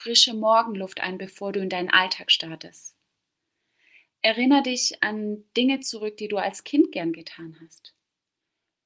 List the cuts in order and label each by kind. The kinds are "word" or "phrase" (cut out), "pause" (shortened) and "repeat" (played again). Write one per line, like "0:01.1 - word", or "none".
none